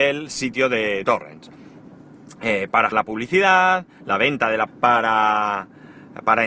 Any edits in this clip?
yes; 3 cuts; at 1.0 s, 2.9 s, 4.7 s

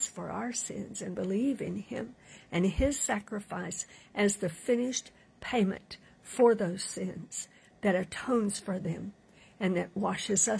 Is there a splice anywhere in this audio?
no; 0 cuts

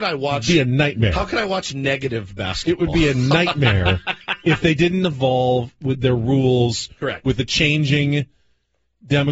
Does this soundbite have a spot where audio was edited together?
no; 0 cuts

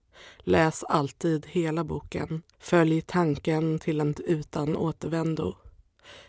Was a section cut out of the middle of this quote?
yes; 2 cuts; at 2.5 s, 4.1 s

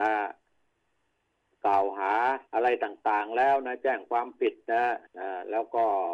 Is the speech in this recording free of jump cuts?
no; 2 cuts; at 2.5 s, 5.1 s

